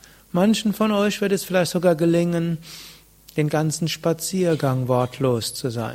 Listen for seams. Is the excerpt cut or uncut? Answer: uncut